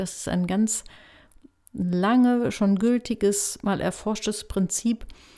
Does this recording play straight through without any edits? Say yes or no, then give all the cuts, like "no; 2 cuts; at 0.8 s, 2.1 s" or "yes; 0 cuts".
yes; 0 cuts